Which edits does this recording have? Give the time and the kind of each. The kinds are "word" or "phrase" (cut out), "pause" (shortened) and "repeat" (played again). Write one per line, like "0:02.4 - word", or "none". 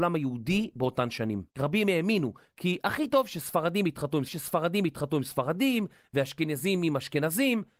0:01.5 - pause
0:04.3 - repeat